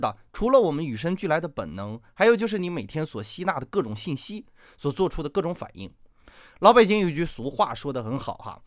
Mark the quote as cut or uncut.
uncut